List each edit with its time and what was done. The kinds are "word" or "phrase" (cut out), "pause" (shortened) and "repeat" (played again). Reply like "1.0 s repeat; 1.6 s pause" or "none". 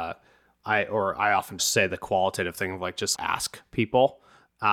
3.2 s word